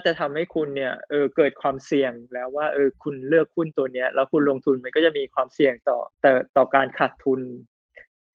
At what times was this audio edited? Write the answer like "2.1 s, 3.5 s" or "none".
6.1 s